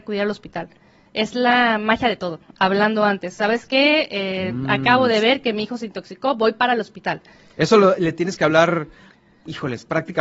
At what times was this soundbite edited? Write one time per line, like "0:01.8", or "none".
none